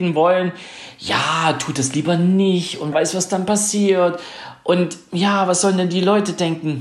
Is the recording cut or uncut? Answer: cut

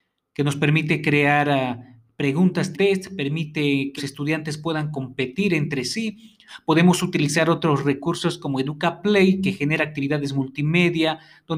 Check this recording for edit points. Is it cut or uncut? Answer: cut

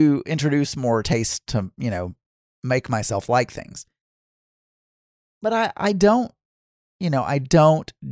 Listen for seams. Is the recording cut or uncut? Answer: uncut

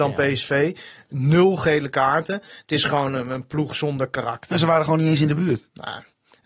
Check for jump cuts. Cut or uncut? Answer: uncut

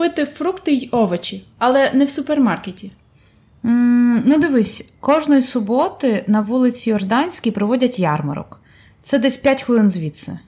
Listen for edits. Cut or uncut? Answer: uncut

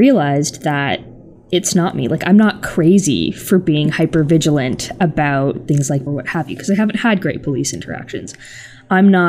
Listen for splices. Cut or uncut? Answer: cut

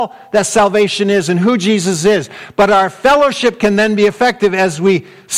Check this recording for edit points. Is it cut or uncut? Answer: uncut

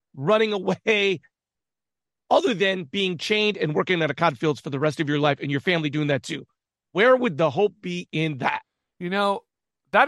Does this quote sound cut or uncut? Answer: uncut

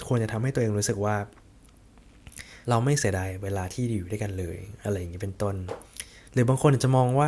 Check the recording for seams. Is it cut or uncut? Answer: cut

